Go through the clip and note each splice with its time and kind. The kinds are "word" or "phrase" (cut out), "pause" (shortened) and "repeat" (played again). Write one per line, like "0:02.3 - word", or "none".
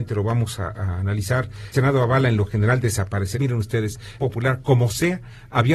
0:01.7 - word
0:03.3 - phrase
0:04.2 - phrase